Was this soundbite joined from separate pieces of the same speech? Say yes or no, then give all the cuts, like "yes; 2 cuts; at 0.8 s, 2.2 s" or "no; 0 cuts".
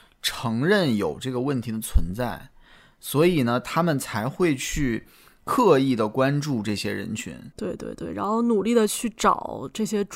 no; 0 cuts